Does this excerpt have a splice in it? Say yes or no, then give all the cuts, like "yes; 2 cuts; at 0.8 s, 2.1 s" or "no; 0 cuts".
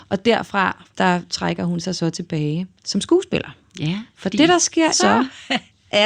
yes; 3 cuts; at 0.9 s, 2.8 s, 4.9 s